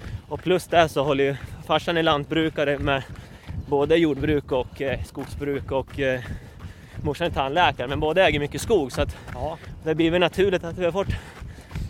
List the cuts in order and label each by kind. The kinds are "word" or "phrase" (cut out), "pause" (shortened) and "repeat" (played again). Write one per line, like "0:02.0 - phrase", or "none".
none